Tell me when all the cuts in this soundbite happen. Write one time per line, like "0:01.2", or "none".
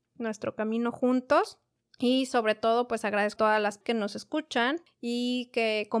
0:03.4
0:03.8